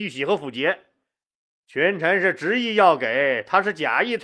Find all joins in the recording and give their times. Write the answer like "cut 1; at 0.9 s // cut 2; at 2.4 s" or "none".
none